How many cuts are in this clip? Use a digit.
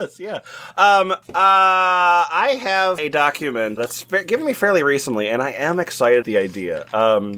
4